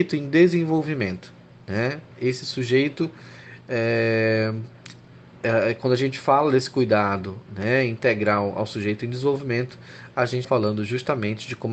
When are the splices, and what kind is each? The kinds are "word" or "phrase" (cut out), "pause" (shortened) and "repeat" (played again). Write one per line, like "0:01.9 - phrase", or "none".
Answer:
0:02.1 - pause
0:07.5 - pause
0:10.4 - word